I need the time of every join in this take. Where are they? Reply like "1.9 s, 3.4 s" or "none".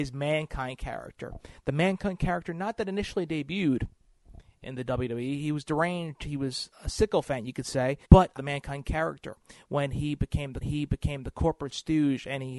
6.7 s, 8.0 s, 8.4 s, 10.6 s